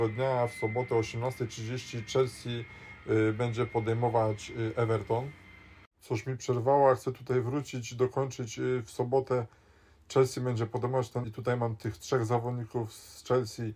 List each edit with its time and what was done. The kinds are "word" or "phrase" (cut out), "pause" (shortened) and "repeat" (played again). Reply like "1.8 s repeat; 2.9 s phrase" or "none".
11.2 s word